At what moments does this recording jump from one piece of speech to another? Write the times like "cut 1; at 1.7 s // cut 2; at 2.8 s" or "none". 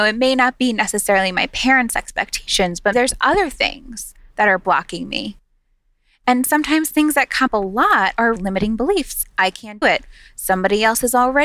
cut 1; at 2.9 s // cut 2; at 7.5 s // cut 3; at 8.4 s // cut 4; at 9.2 s // cut 5; at 9.8 s